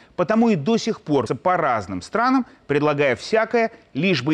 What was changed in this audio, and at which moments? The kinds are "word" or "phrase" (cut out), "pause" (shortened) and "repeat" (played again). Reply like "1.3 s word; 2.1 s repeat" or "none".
1.3 s word